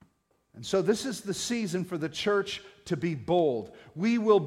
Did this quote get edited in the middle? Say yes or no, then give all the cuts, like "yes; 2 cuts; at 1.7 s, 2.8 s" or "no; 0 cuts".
no; 0 cuts